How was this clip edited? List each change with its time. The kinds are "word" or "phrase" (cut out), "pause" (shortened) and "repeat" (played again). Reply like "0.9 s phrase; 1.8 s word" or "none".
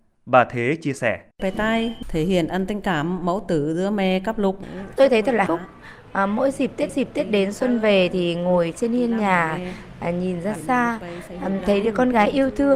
1.3 s pause; 5.5 s word; 6.9 s repeat; 10.6 s word